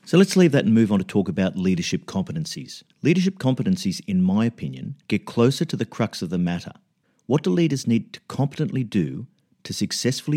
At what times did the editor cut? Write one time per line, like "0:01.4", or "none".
0:02.9
0:05.0
0:07.0

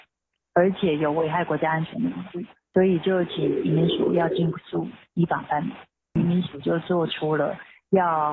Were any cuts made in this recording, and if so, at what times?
none

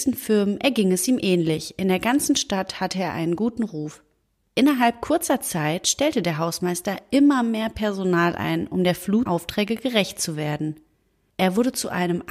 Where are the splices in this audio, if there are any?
0:09.3

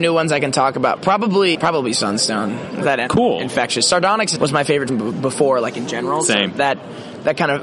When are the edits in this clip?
0:01.5
0:03.1
0:04.4
0:04.9

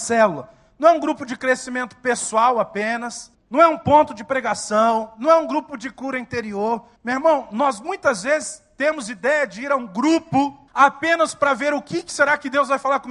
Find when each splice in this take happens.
0:03.3
0:07.0
0:10.7

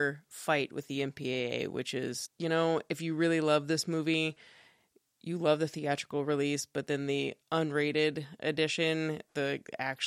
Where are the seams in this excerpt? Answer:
0:07.4

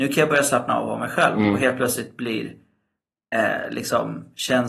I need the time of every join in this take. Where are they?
none

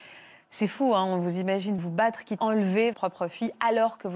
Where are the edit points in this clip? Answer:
0:01.8
0:02.4
0:02.9

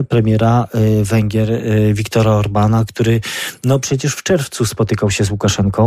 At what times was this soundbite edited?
none

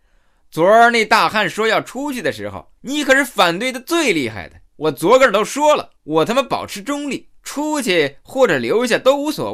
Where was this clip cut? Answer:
0:02.8
0:04.6
0:06.0
0:07.4

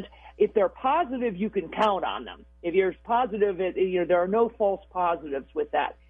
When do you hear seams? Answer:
none

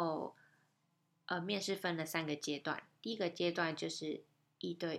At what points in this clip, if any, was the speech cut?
none

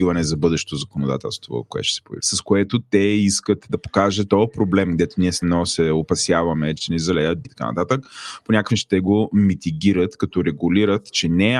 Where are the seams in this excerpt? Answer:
0:02.2
0:03.7
0:04.3
0:05.4
0:06.8
0:07.4
0:08.7

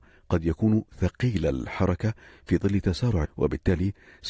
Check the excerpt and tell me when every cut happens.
0:03.3

